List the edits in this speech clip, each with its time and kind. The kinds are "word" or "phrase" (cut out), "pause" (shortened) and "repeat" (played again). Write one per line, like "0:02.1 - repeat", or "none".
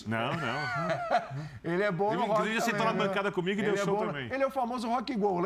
none